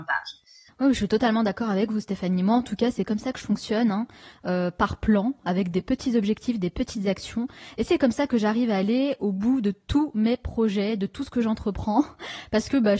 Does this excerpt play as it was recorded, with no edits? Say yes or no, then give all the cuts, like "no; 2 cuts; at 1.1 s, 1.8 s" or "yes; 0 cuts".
yes; 0 cuts